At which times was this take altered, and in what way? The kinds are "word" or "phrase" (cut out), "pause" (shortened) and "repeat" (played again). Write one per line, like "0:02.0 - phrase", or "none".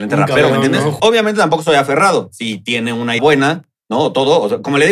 0:01.0 - word
0:03.2 - word